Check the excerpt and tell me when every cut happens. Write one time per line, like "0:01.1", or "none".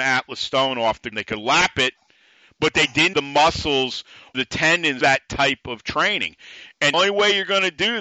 0:01.1
0:03.1
0:04.3
0:05.0
0:06.9